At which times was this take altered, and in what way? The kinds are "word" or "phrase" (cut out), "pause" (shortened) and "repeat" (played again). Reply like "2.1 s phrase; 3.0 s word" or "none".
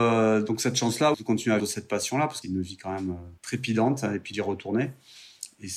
1.1 s phrase; 1.6 s word; 2.4 s word; 3.4 s pause; 4.3 s word